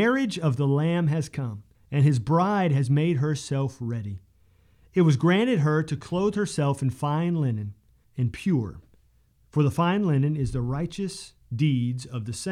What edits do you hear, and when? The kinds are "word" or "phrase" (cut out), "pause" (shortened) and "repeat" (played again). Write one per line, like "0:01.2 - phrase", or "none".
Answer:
0:01.7 - pause
0:08.0 - word